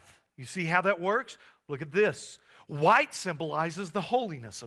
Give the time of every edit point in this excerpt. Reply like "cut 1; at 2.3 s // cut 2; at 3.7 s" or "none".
none